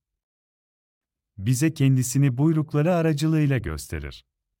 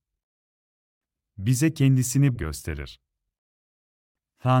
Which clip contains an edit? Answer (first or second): second